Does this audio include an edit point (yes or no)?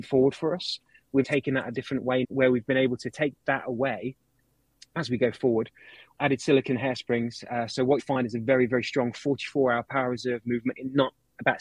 yes